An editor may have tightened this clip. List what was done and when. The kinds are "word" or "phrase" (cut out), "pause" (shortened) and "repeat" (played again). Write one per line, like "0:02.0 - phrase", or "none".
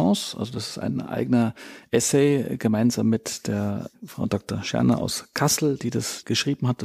none